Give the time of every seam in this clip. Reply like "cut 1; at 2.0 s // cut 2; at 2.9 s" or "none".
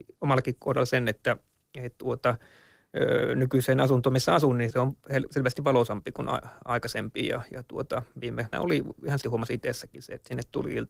cut 1; at 4.7 s // cut 2; at 8.5 s // cut 3; at 9.2 s